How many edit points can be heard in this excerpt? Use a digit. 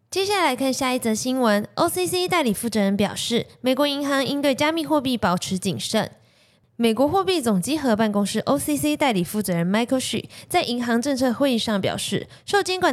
0